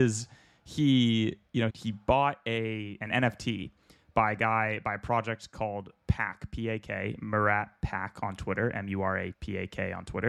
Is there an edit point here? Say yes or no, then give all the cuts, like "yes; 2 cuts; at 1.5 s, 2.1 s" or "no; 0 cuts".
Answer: yes; 2 cuts; at 1.7 s, 9.3 s